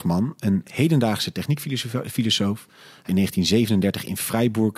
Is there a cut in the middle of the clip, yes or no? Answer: yes